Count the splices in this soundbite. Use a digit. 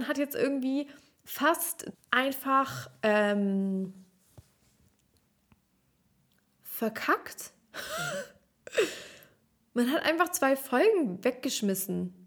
1